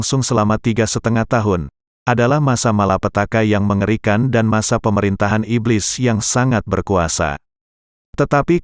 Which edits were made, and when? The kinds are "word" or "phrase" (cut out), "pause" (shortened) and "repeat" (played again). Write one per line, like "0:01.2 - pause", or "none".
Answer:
none